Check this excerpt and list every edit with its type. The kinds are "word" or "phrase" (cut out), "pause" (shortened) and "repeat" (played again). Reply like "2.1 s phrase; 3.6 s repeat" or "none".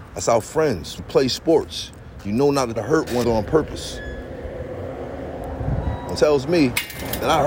1.0 s word; 2.8 s word; 3.2 s word; 6.2 s word